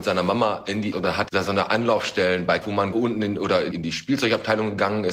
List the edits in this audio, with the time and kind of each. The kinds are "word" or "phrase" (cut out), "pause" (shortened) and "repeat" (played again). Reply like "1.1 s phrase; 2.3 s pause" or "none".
0.9 s word; 1.3 s word; 2.6 s word; 2.9 s word; 3.7 s word